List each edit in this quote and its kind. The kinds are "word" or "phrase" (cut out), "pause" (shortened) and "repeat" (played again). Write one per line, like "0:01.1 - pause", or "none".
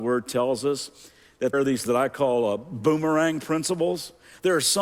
0:01.5 - word
0:01.9 - word